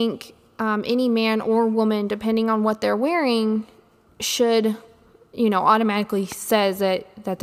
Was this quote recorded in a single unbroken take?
yes; 0 cuts

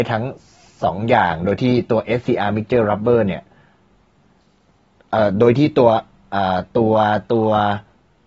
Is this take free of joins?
yes; 0 cuts

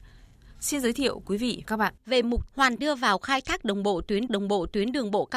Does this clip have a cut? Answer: yes; 6 cuts; at 1.2 s, 1.6 s, 2.0 s, 2.5 s, 2.8 s, 4.3 s

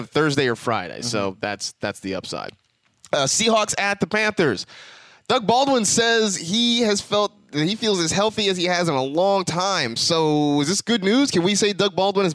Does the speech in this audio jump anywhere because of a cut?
no; 0 cuts

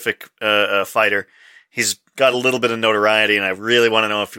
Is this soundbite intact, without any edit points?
yes; 0 cuts

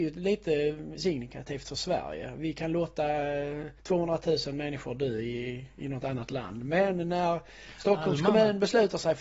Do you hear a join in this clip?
yes; 1 cut; at 3.8 s

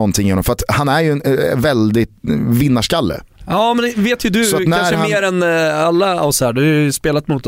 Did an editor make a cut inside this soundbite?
no; 0 cuts

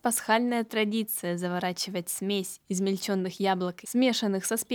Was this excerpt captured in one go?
no; 1 cut; at 3.8 s

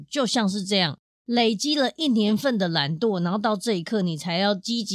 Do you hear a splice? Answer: yes; 1 cut; at 1.1 s

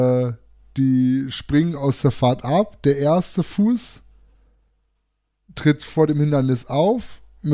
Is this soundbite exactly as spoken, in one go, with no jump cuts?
yes; 0 cuts

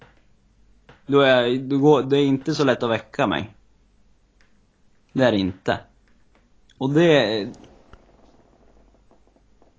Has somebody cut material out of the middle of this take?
no; 0 cuts

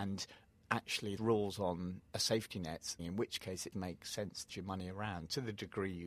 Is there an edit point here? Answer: yes; 5 cuts; at 1.2 s, 2.1 s, 3.0 s, 3.7 s, 4.5 s

